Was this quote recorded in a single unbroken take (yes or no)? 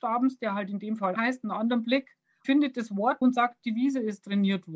no